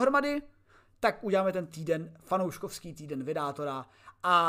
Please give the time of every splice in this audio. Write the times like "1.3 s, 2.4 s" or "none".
1.7 s